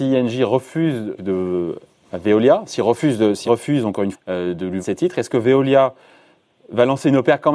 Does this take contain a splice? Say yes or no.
yes